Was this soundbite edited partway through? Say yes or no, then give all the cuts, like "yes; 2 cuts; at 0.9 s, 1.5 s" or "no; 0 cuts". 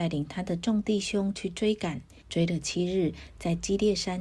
yes; 1 cut; at 2.2 s